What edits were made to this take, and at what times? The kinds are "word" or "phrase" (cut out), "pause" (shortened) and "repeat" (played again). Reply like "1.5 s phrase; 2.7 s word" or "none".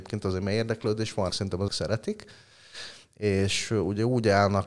1.3 s word; 1.7 s word

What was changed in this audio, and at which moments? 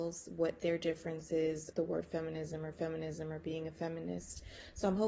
1.7 s word; 2.7 s repeat

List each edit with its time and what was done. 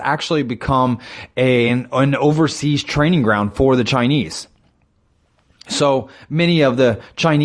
none

